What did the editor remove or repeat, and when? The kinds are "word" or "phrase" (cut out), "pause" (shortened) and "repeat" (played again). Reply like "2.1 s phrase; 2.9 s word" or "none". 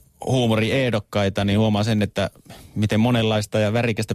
none

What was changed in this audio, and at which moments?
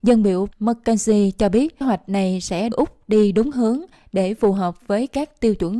1.8 s word; 2.7 s word

